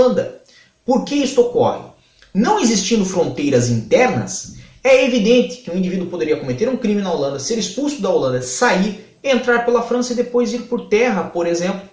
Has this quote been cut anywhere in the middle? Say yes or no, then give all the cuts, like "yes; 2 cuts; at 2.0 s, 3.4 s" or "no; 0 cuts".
no; 0 cuts